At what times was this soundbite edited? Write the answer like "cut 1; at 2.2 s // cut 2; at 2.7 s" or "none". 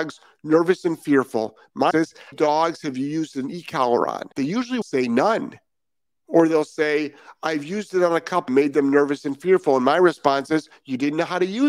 cut 1; at 1.9 s // cut 2; at 2.3 s // cut 3; at 4.3 s // cut 4; at 4.8 s // cut 5; at 6.1 s // cut 6; at 8.5 s